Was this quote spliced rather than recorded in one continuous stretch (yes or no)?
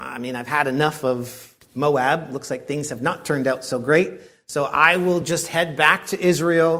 no